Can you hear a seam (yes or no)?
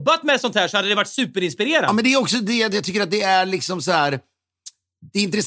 no